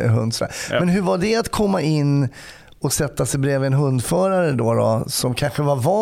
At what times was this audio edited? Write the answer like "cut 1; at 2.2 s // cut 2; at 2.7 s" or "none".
none